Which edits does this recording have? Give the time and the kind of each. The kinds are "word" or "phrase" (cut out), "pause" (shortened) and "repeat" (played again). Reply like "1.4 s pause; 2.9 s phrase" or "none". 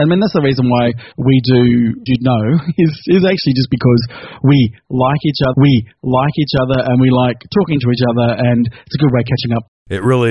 1.1 s pause; 2.1 s phrase; 5.5 s repeat